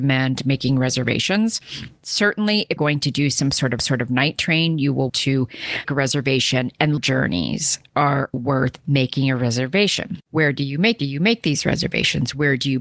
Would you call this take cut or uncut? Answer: cut